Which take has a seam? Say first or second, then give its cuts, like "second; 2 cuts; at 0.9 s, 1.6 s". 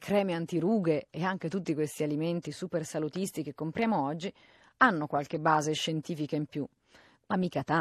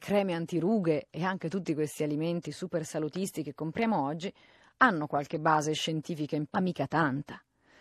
second; 1 cut; at 6.5 s